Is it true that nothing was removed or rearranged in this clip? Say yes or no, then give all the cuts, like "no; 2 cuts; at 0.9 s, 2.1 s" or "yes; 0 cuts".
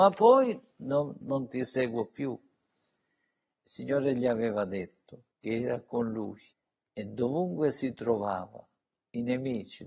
no; 3 cuts; at 1.2 s, 5.3 s, 6.5 s